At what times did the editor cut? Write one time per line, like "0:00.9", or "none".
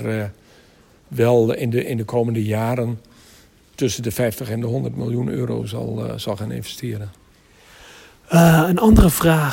none